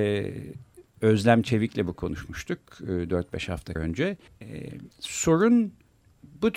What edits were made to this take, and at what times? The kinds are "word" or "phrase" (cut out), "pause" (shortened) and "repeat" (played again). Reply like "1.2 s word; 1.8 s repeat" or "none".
1.9 s word; 3.8 s word; 4.3 s pause; 4.9 s pause